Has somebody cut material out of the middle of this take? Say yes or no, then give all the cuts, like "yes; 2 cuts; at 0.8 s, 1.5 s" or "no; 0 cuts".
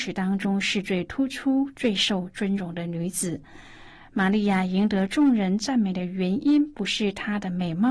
no; 0 cuts